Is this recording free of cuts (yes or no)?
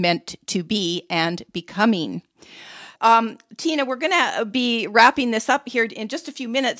no